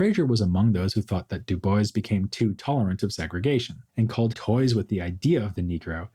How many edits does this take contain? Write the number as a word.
two